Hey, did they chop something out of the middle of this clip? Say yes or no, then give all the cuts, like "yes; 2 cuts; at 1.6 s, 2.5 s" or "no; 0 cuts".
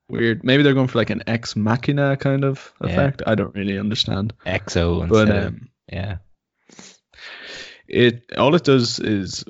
yes; 2 cuts; at 4.4 s, 8.3 s